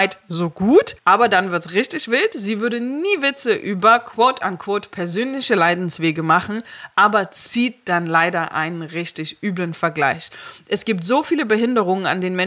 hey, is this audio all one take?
no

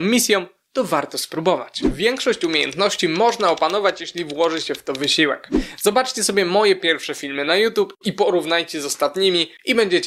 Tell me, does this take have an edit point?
no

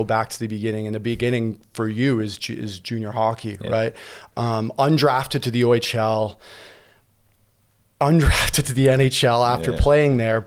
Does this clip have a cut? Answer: no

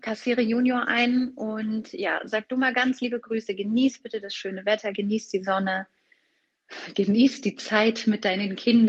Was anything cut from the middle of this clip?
no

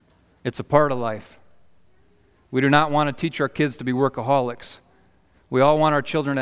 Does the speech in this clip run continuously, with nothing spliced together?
yes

